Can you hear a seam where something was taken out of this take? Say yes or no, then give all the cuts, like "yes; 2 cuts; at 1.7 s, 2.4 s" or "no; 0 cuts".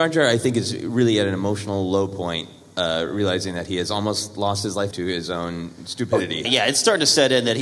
yes; 2 cuts; at 4.9 s, 6.4 s